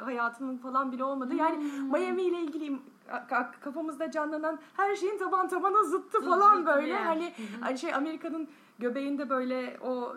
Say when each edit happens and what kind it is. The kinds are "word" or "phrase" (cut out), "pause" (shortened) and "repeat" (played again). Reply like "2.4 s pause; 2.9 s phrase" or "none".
none